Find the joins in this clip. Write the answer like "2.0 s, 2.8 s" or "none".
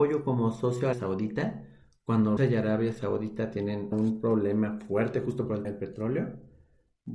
0.9 s, 2.4 s, 3.9 s, 5.6 s